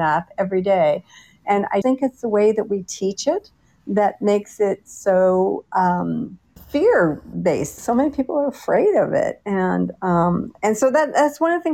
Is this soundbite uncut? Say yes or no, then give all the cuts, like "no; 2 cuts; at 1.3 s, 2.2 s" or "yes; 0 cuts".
no; 3 cuts; at 1.8 s, 6.6 s, 7.8 s